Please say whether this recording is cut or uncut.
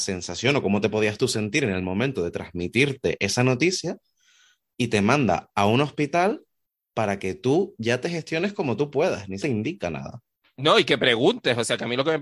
cut